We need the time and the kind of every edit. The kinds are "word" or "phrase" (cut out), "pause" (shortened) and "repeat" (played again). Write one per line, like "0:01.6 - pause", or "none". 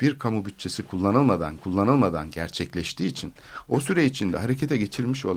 0:01.6 - repeat